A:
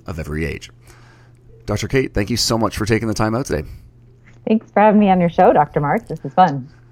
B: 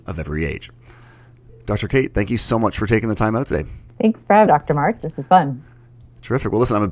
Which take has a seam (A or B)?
B